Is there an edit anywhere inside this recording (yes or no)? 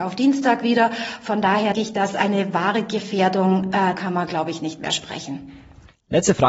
yes